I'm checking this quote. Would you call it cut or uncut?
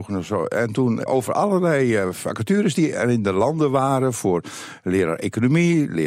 cut